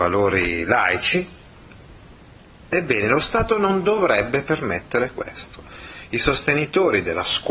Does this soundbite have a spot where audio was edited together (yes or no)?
no